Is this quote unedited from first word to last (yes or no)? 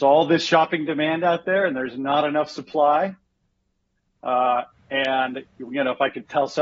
yes